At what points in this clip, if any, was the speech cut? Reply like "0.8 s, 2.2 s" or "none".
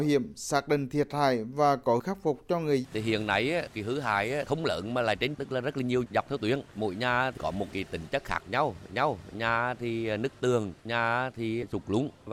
2.0 s, 2.8 s, 5.3 s, 6.1 s, 8.9 s

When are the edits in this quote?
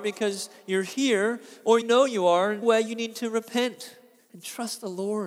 1.8 s, 2.6 s, 4.2 s

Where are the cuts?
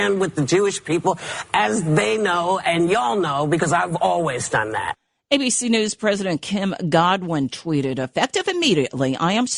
none

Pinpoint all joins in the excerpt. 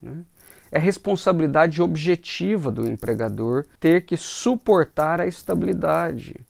3.8 s

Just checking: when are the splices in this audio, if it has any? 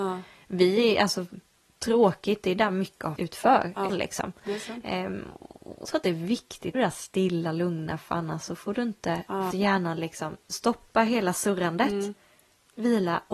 3.2 s, 3.9 s, 5.8 s, 6.7 s, 9.5 s

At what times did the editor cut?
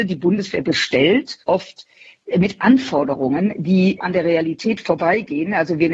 1.4 s, 4.0 s

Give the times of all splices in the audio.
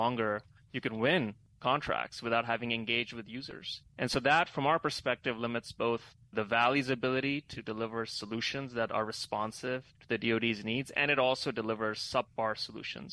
none

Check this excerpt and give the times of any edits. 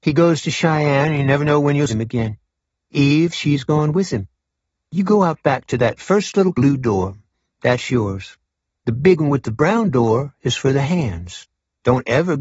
1.9 s, 6.5 s

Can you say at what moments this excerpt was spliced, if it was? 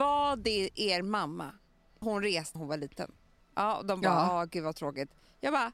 2.0 s, 2.6 s, 3.4 s

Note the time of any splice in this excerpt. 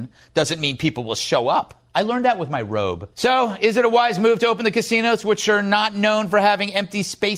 1.9 s, 3.1 s

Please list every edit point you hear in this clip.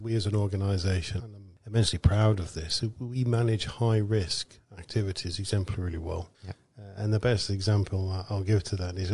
1.2 s, 6.3 s

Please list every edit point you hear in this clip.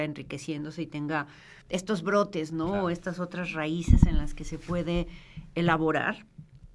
1.6 s

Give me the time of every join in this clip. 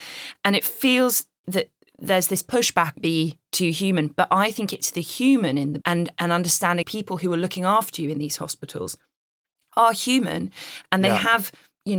1.4 s, 2.9 s, 5.8 s, 6.8 s

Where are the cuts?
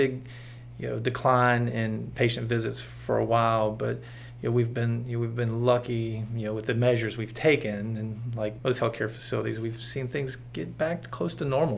8.6 s

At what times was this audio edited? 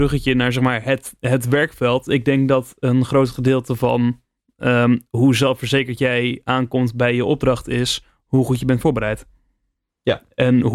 none

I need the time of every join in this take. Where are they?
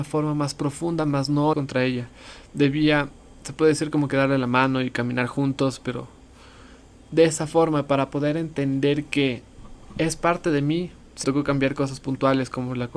1.5 s, 11.2 s

